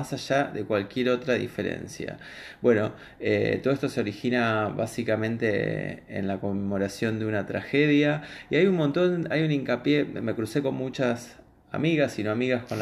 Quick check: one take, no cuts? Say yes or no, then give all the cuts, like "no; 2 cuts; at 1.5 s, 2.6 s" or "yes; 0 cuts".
yes; 0 cuts